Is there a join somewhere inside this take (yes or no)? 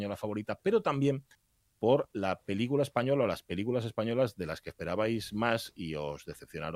no